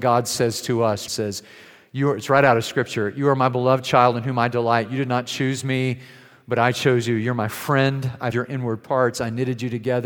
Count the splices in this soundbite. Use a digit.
2